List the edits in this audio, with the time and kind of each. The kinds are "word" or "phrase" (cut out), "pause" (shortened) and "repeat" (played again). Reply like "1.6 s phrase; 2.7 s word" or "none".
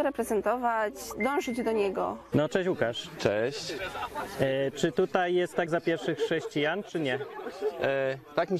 5.7 s word